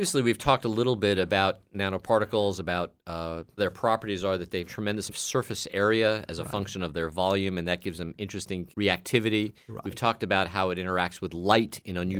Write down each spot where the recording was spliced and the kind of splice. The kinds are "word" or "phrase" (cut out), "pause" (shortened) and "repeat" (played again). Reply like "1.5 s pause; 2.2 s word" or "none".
3.6 s word; 4.7 s word; 5.1 s word; 8.7 s word